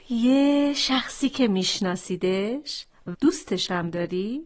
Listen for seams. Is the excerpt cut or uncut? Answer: cut